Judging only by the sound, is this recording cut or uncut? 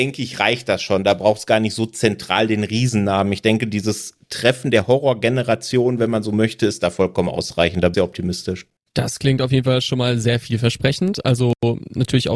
cut